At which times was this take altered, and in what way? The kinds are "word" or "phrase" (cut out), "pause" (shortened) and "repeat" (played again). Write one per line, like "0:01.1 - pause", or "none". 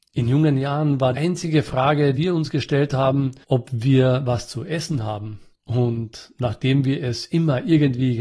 0:01.1 - word
0:02.1 - word
0:03.4 - pause
0:05.5 - pause